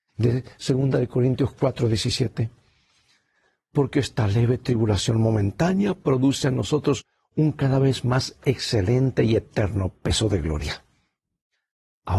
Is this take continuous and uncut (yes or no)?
yes